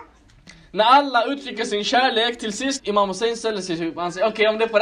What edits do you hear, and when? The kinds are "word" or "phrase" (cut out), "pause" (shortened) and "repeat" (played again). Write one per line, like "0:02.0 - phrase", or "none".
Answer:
0:02.8 - word